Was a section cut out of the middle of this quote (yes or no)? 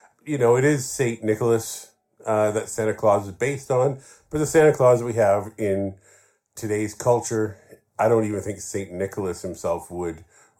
no